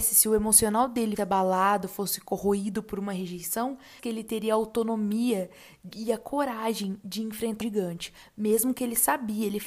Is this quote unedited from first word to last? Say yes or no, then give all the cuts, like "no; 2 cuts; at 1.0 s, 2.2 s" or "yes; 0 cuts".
no; 4 cuts; at 1.2 s, 4.0 s, 5.9 s, 7.6 s